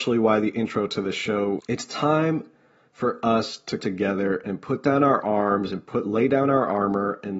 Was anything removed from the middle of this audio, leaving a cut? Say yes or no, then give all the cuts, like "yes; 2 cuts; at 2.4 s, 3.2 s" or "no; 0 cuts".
yes; 2 cuts; at 1.6 s, 3.8 s